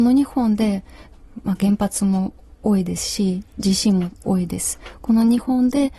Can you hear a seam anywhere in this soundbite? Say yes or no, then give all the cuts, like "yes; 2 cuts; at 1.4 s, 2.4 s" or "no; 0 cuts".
no; 0 cuts